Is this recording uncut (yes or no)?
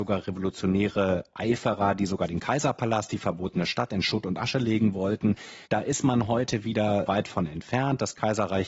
no